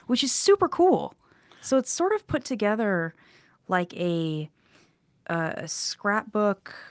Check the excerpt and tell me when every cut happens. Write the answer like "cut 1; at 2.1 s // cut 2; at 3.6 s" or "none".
none